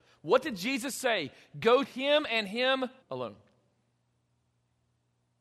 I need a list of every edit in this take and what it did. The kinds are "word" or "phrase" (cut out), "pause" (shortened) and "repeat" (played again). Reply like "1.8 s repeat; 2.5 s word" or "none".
1.8 s word; 3.0 s pause